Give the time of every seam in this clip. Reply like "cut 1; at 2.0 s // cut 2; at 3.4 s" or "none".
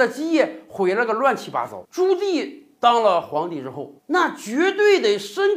cut 1; at 1.8 s // cut 2; at 4.0 s